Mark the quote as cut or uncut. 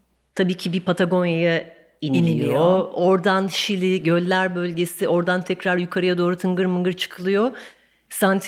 uncut